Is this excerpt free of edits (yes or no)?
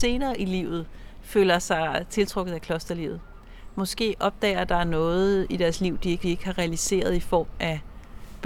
no